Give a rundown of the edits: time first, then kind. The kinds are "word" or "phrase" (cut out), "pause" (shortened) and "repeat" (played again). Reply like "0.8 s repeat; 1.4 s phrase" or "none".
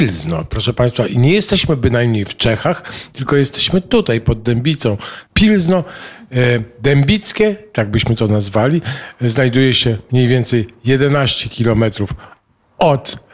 5.3 s pause